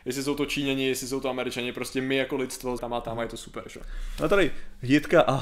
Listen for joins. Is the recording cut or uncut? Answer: cut